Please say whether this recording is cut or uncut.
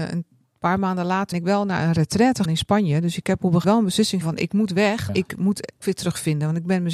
cut